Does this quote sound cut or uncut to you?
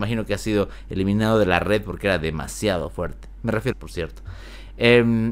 cut